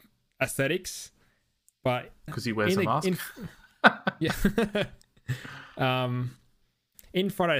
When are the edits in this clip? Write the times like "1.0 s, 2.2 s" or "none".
2.3 s